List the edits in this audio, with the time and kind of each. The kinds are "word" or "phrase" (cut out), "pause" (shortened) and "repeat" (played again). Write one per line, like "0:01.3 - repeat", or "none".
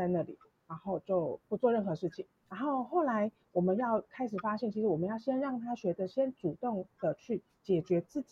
0:02.4 - pause